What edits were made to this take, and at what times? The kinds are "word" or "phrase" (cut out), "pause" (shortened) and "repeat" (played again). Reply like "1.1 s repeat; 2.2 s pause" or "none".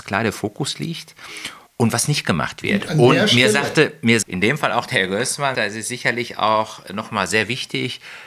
1.7 s pause; 4.2 s word; 5.5 s word

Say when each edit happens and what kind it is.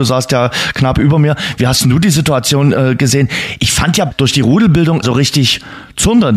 5.0 s phrase

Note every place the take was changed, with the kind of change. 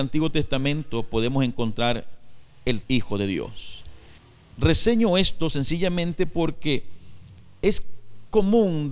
2.8 s word; 4.2 s pause

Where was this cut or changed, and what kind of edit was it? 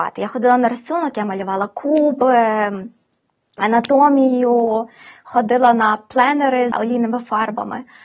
6.7 s word

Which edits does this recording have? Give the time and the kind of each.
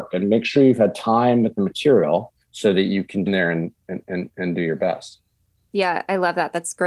2.4 s pause; 3.3 s phrase

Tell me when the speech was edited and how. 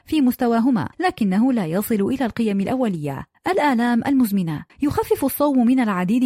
0.9 s pause; 3.3 s pause; 4.7 s pause

